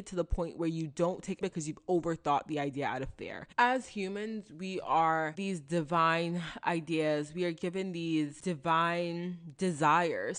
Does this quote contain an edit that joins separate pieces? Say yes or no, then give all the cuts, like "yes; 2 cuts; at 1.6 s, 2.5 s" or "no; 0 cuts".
yes; 2 cuts; at 1.4 s, 5.4 s